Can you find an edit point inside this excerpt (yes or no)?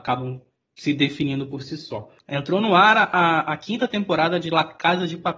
yes